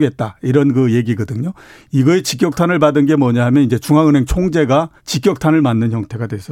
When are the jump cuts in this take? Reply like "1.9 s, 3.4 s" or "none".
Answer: 5.0 s